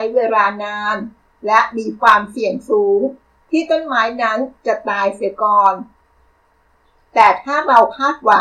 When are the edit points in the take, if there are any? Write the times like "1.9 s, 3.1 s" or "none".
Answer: none